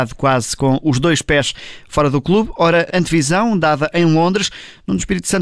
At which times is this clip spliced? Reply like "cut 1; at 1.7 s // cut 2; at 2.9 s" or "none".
cut 1; at 2.9 s